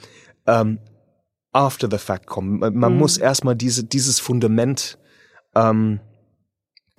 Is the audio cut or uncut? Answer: uncut